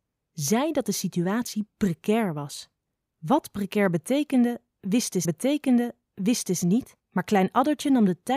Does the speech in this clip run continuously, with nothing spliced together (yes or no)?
no